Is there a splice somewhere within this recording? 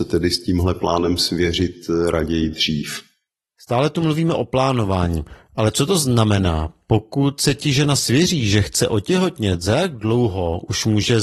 no; 0 cuts

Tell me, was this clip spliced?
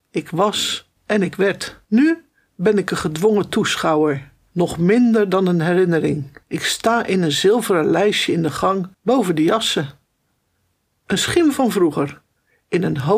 yes; 5 cuts; at 1.0 s, 1.8 s, 4.5 s, 6.4 s, 8.9 s

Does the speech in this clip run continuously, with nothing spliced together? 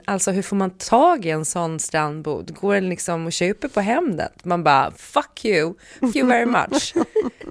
no; 1 cut; at 6.1 s

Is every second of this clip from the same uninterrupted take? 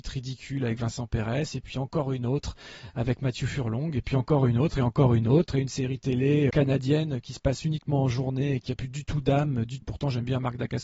no; 2 cuts; at 6.5 s, 9.8 s

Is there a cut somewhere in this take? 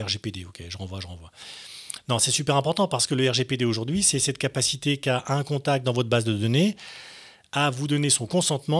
no; 0 cuts

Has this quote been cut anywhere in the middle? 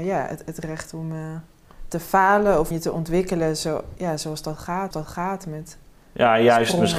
yes; 2 cuts; at 2.7 s, 4.9 s

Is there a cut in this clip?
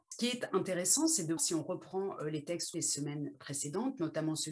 yes; 3 cuts; at 1.4 s, 2.7 s, 3.3 s

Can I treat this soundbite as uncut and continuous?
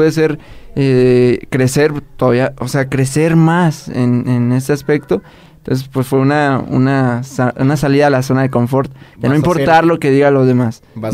yes; 0 cuts

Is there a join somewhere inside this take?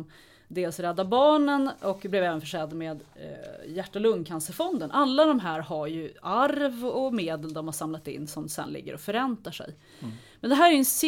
no; 0 cuts

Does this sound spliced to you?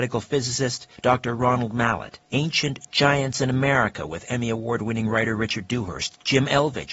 yes; 2 cuts; at 1.0 s, 2.2 s

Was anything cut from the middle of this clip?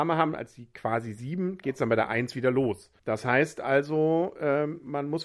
yes; 1 cut; at 3.0 s

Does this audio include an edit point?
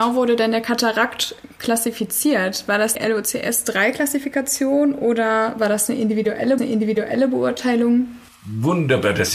yes; 2 cuts; at 2.9 s, 6.6 s

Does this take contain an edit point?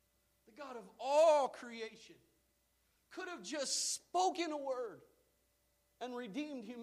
no; 0 cuts

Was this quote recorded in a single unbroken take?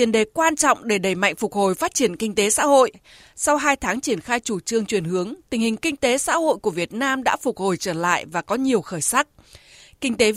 yes; 0 cuts

